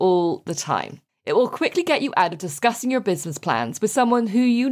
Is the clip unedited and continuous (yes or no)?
no